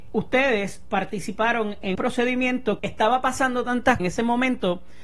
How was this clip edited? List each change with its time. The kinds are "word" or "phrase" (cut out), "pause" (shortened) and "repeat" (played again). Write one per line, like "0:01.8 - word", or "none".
0:01.9 - word
0:02.8 - word
0:04.0 - phrase